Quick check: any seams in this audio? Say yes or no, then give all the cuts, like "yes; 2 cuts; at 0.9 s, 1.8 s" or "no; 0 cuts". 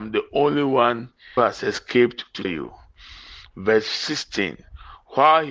yes; 2 cuts; at 1.4 s, 2.4 s